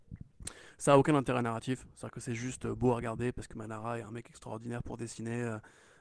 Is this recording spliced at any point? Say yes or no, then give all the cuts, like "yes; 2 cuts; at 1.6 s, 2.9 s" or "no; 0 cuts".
no; 0 cuts